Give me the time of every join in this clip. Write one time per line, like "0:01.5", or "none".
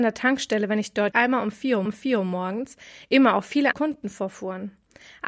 0:01.1
0:01.9
0:03.7